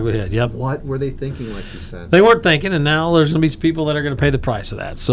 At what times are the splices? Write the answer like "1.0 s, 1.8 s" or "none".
none